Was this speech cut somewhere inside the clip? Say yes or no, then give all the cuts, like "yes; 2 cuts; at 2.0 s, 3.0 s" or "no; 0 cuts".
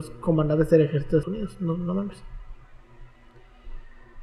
yes; 1 cut; at 1.2 s